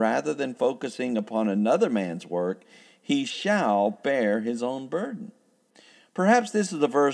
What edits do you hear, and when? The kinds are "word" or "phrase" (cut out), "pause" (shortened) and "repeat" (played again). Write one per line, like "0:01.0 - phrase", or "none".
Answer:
none

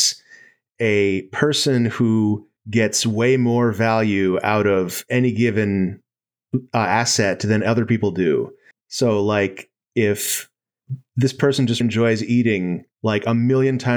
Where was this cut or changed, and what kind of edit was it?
0:02.6 - pause
0:08.7 - pause
0:11.8 - word
0:12.9 - pause

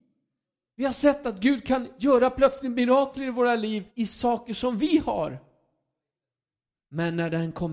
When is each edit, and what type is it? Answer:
0:03.9 - pause

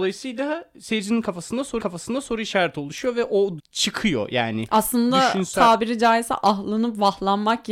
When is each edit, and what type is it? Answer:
0:01.8 - repeat
0:03.6 - word

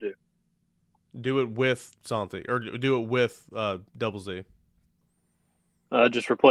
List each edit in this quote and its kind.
0:03.9 - pause

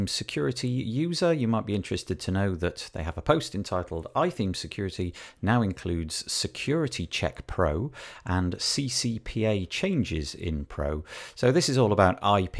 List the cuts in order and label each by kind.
none

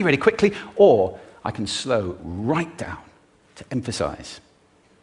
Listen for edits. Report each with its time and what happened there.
none

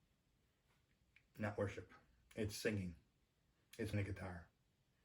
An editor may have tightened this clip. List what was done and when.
0:03.9 - word

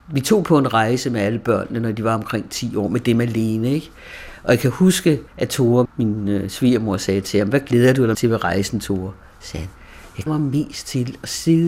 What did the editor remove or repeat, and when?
0:05.3 - pause
0:05.8 - word
0:08.1 - word
0:10.3 - word

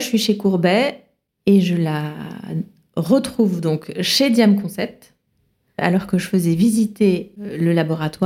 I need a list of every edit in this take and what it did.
none

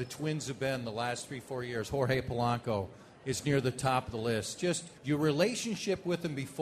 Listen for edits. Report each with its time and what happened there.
0:05.0 - pause

